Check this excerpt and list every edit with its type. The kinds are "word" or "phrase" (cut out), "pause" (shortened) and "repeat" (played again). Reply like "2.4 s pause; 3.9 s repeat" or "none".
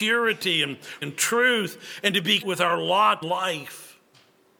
1.0 s word; 2.4 s word; 3.2 s word